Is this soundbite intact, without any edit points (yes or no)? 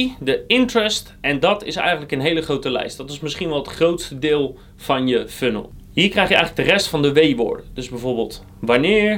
yes